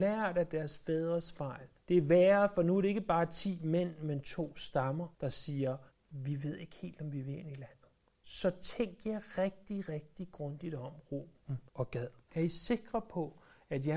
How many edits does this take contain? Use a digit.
6